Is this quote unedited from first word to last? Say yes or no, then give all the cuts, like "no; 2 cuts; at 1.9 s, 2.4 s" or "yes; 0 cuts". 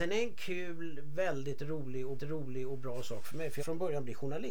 no; 2 cuts; at 2.2 s, 3.6 s